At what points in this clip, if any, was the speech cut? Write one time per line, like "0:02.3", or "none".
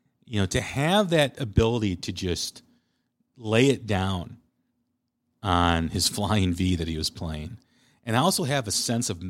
none